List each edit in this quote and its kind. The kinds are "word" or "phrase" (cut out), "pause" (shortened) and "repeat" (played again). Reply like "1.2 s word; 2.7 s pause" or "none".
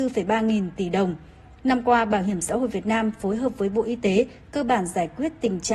none

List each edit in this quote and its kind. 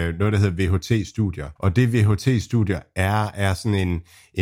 1.6 s pause

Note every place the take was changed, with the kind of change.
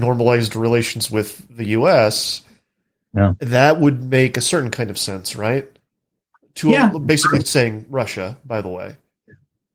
none

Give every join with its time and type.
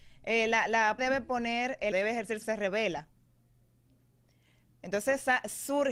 1.0 s word; 1.9 s word; 2.4 s phrase

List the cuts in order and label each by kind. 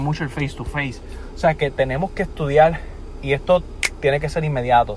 none

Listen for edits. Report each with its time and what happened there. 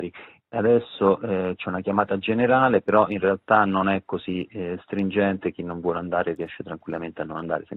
none

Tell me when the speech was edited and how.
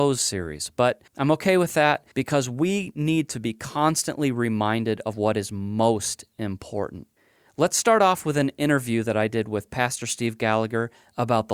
1.1 s pause; 2.1 s pause; 7.2 s pause

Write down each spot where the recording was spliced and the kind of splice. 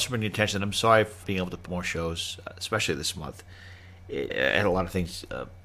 1.2 s word; 1.7 s word; 4.3 s word

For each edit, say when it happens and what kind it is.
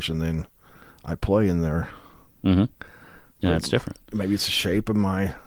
none

